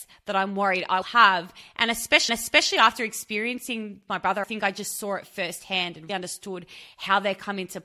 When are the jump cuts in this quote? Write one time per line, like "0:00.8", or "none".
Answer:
0:01.0
0:02.3
0:04.1
0:04.4
0:06.1